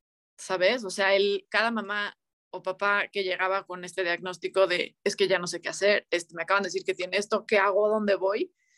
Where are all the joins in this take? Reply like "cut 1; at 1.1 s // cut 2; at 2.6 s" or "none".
none

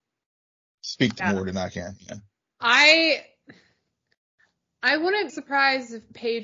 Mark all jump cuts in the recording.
cut 1; at 1.2 s // cut 2; at 5.3 s

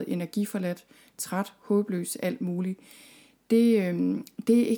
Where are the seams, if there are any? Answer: none

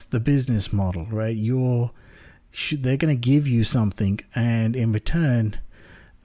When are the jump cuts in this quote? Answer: none

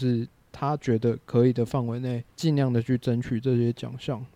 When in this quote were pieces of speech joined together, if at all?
cut 1; at 2.3 s

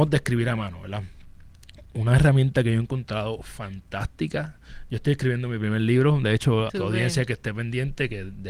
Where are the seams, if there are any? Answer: cut 1; at 6.7 s

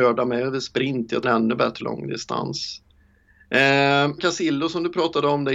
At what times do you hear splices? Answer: cut 1; at 1.2 s // cut 2; at 1.8 s // cut 3; at 4.2 s

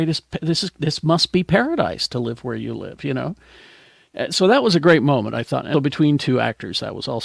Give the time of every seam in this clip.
cut 1; at 5.7 s

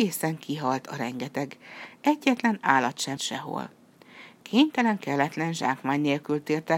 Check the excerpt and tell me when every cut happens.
cut 1; at 3.2 s

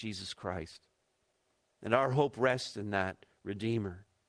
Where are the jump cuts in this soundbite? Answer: cut 1; at 1.5 s

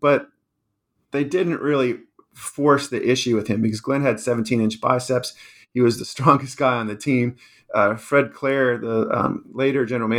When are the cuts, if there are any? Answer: none

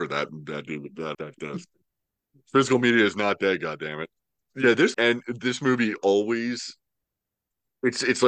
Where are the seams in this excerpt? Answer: cut 1; at 1.1 s // cut 2; at 4.4 s // cut 3; at 4.9 s

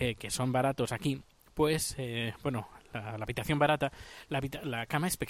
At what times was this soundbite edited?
none

